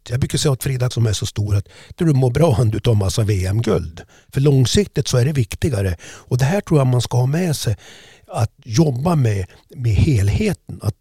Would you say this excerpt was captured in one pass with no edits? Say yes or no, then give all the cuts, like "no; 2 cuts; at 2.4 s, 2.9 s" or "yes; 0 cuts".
no; 3 cuts; at 0.9 s, 2.0 s, 8.6 s